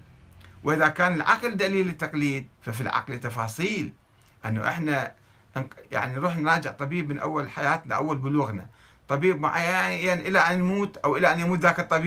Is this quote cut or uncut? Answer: cut